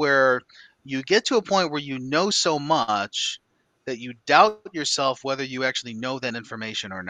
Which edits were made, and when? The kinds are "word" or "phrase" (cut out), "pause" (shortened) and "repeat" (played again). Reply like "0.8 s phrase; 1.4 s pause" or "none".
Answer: none